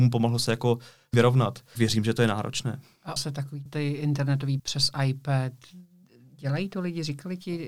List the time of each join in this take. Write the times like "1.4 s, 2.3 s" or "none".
1.1 s, 1.8 s, 3.2 s, 3.7 s, 4.6 s